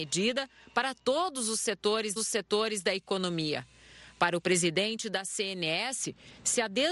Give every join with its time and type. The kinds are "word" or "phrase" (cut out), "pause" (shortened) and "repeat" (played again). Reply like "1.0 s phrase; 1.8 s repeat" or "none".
2.2 s repeat